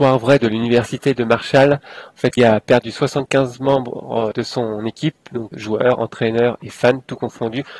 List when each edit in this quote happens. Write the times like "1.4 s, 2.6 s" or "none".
2.4 s, 4.3 s, 5.5 s